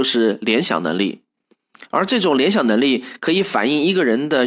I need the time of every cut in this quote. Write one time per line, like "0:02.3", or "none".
none